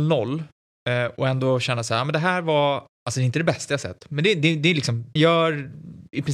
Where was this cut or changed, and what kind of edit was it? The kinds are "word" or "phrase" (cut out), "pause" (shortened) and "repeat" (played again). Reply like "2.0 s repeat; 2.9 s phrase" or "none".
5.2 s word